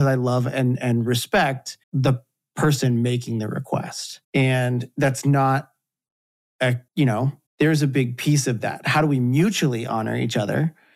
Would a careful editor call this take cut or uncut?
cut